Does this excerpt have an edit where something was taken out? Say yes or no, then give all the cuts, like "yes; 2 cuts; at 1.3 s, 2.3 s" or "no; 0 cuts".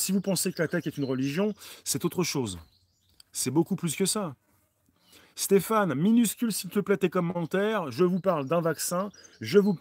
no; 0 cuts